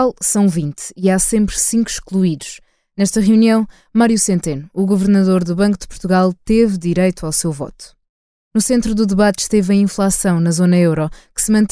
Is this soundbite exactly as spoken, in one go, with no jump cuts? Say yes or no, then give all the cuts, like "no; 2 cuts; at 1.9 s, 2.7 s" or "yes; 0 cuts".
yes; 0 cuts